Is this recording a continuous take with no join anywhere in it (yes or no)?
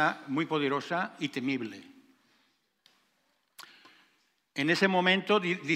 yes